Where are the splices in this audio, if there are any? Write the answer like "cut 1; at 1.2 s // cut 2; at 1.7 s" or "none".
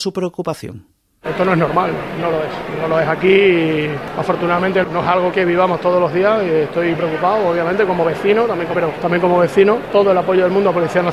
cut 1; at 4.8 s // cut 2; at 5.3 s // cut 3; at 6.9 s // cut 4; at 8.7 s // cut 5; at 9.9 s